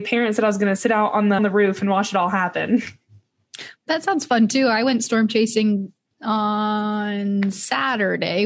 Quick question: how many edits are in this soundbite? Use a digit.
3